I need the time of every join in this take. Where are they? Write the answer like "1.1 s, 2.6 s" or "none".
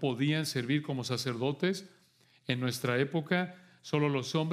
none